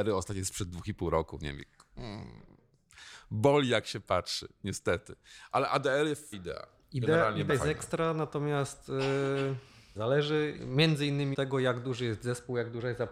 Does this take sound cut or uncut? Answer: cut